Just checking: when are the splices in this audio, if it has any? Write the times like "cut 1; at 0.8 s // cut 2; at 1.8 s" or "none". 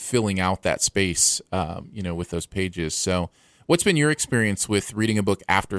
none